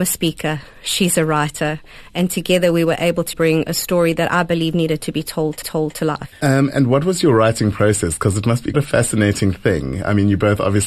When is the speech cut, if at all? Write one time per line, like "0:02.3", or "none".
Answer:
0:03.3
0:05.6
0:08.7